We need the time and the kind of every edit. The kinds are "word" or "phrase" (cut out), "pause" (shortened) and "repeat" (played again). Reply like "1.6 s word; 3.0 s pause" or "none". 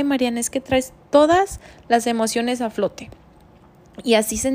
none